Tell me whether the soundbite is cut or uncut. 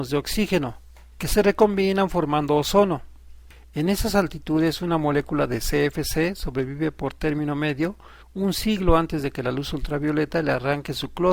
cut